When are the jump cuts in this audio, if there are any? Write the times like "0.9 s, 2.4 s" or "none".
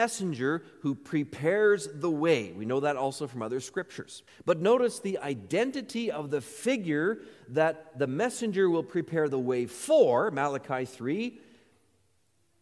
4.3 s